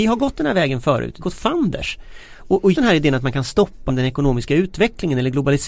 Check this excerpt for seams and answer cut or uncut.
cut